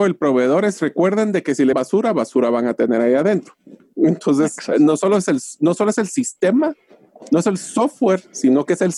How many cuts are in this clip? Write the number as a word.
one